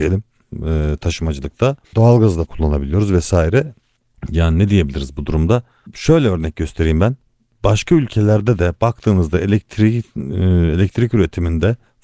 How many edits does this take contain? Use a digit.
2